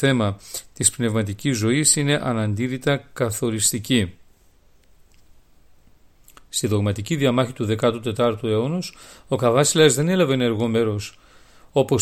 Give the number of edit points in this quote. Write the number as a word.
zero